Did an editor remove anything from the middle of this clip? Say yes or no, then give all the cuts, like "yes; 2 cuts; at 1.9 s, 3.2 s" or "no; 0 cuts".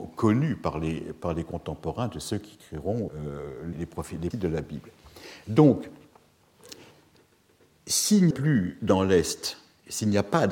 yes; 4 cuts; at 3.1 s, 3.7 s, 4.3 s, 8.3 s